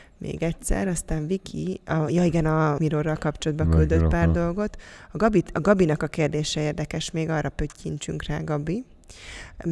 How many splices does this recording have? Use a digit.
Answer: 1